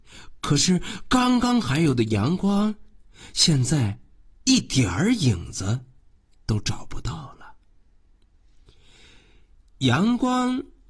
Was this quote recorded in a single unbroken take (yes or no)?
yes